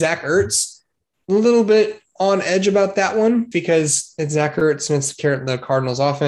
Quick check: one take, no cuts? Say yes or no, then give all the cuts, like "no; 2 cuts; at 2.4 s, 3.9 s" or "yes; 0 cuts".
no; 2 cuts; at 1.0 s, 3.5 s